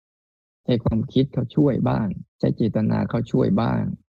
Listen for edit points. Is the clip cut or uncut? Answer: cut